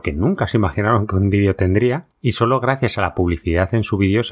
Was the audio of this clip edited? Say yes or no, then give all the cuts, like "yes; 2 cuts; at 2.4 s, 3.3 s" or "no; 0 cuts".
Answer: yes; 1 cut; at 2.1 s